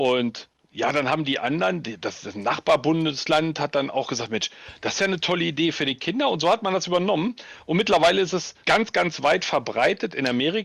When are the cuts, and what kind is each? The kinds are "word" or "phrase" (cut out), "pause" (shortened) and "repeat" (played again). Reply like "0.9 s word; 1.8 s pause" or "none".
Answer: 8.6 s pause